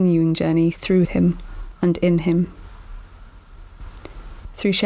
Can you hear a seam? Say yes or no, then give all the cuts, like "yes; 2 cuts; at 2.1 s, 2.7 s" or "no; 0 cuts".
yes; 1 cut; at 1.0 s